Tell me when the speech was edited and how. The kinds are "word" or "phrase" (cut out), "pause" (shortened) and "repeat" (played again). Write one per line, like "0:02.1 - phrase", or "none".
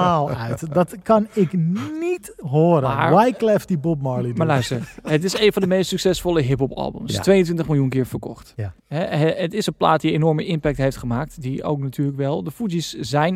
0:08.8 - pause